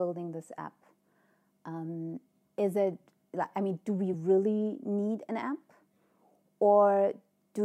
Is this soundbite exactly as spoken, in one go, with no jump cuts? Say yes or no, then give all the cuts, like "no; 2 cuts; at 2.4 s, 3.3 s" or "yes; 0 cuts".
yes; 0 cuts